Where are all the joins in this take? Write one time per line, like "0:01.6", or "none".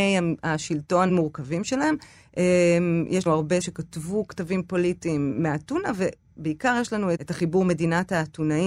0:01.1
0:03.3
0:03.6
0:07.2